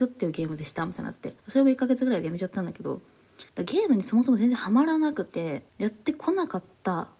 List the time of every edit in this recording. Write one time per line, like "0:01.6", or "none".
0:01.4
0:03.5
0:05.7